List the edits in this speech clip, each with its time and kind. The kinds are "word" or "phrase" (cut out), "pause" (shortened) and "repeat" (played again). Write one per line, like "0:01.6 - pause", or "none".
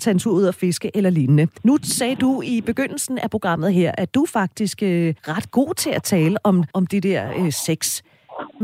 0:01.6 - pause
0:05.2 - pause
0:06.7 - pause